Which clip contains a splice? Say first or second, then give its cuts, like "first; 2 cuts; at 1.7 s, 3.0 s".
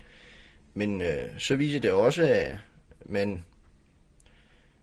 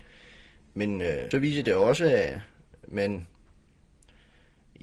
second; 1 cut; at 1.3 s